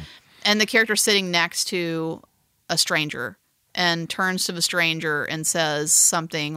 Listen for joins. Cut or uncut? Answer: uncut